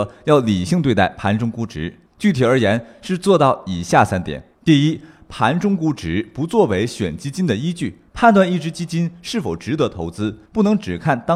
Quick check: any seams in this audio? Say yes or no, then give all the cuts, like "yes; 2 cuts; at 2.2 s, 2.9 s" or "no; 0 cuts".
yes; 4 cuts; at 2.1 s, 4.5 s, 8.1 s, 10.5 s